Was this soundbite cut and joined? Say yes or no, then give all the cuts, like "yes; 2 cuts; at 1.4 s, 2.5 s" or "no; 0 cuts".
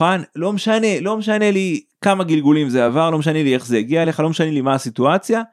no; 0 cuts